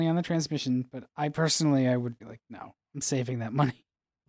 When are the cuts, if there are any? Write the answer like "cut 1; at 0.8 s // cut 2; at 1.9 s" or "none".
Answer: cut 1; at 2.2 s